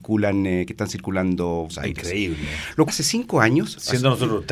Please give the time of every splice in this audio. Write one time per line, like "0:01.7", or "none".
0:01.7
0:02.9